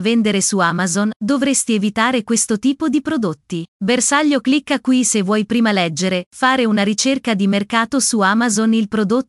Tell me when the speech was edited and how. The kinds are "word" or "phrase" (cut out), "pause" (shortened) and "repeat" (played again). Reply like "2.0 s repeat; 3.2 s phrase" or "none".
3.7 s pause